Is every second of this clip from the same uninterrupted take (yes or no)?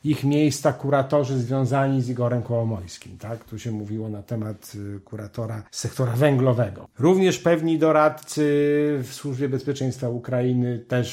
no